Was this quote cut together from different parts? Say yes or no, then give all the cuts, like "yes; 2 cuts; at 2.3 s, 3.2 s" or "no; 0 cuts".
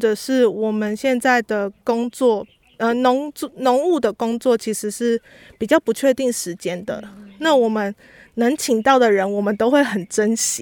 no; 0 cuts